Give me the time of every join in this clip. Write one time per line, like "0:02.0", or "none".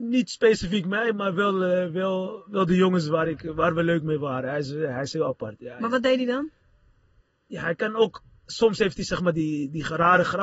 0:07.2

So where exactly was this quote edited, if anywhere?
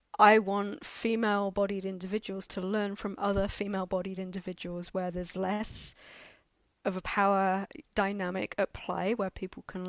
none

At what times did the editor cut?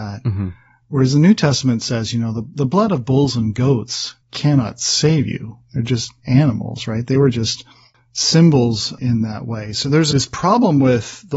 0:04.2

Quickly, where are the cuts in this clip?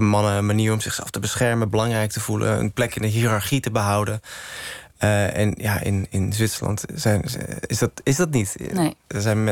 none

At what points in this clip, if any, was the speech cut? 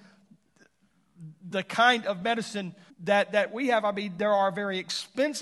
0:02.9

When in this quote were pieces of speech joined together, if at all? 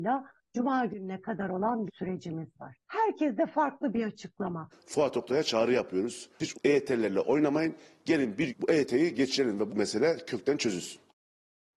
0:01.9
0:06.5
0:08.5
0:09.7

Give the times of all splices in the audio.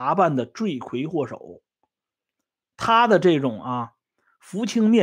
none

